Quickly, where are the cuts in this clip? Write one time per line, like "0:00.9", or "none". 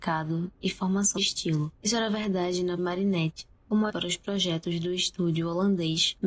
0:01.2
0:01.8
0:02.8
0:03.9